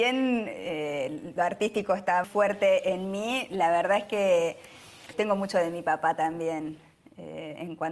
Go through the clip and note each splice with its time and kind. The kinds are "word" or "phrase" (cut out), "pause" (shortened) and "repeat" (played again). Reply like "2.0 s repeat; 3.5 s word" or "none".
2.2 s word; 5.1 s word